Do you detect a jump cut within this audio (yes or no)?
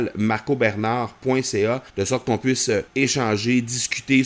yes